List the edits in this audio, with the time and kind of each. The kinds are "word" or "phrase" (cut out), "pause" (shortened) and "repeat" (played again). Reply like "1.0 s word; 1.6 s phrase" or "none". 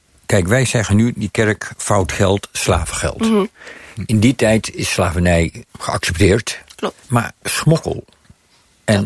5.7 s pause; 7.0 s pause